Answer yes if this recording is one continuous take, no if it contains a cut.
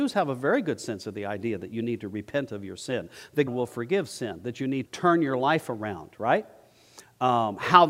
no